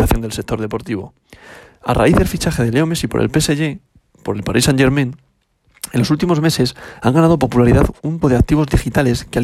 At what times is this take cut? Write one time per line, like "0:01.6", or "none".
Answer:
0:08.2